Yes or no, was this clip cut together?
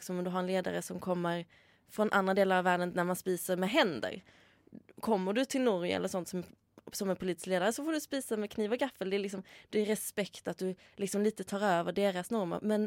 no